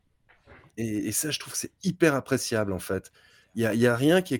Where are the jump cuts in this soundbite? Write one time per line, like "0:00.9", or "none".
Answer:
none